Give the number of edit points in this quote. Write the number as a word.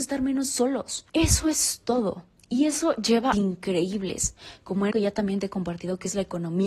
four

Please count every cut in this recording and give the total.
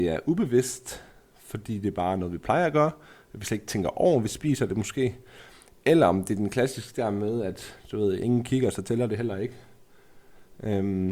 zero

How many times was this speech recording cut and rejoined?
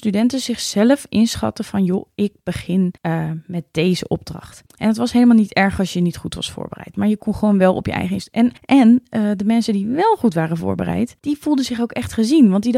four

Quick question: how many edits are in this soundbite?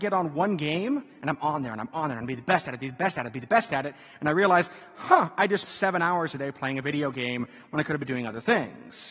one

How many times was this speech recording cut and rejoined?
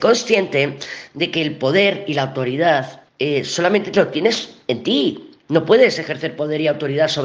one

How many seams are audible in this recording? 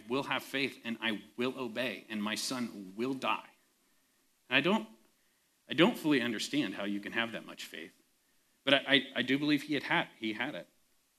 zero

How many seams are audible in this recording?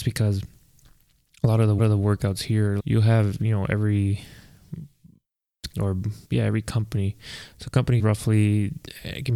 five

